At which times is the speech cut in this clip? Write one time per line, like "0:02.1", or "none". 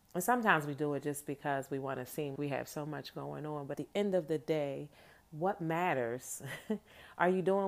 0:02.4
0:03.7